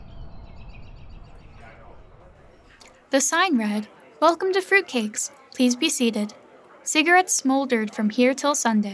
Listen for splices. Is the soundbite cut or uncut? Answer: uncut